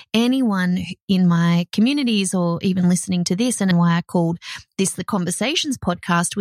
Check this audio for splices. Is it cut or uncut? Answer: cut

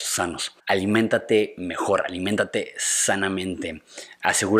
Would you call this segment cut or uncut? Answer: uncut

